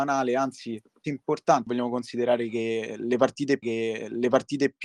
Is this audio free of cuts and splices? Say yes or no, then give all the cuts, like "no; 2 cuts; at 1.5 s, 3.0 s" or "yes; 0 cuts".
no; 3 cuts; at 1.0 s, 1.7 s, 3.6 s